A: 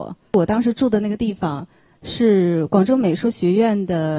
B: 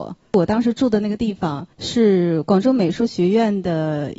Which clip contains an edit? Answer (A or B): B